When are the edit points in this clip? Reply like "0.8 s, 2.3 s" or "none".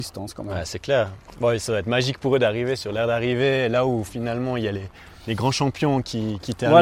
none

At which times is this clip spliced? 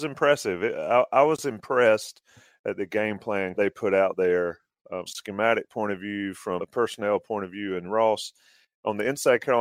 3.6 s, 5.1 s, 6.6 s

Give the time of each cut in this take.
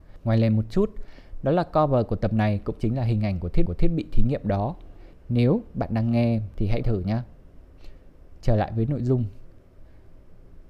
3.7 s, 6.8 s

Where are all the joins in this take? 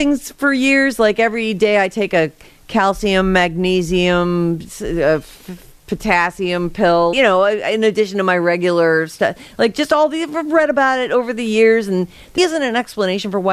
7.1 s, 12.4 s

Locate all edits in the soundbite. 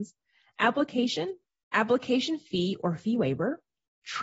none

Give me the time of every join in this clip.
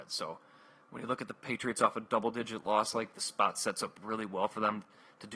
3.1 s

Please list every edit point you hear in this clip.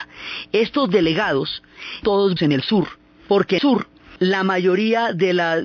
2.0 s, 2.4 s, 3.6 s

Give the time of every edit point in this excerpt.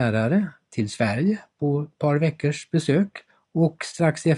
3.3 s

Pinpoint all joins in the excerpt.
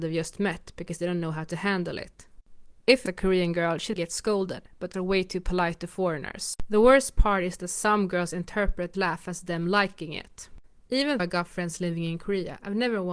3.1 s, 4.0 s, 4.9 s, 8.9 s, 11.2 s

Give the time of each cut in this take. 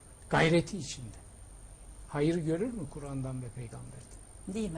none

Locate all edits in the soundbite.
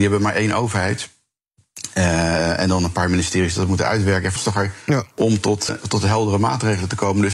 4.4 s, 5.7 s

